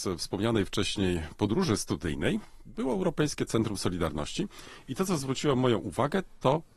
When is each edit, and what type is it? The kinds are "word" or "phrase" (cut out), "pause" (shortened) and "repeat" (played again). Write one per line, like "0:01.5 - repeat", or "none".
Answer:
none